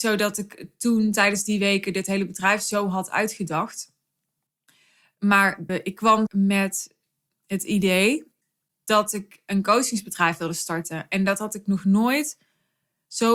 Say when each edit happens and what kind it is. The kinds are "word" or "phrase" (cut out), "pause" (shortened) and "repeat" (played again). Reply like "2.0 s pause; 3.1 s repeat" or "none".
5.7 s word; 6.3 s word